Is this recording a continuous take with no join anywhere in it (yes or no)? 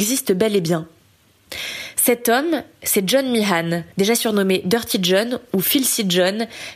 no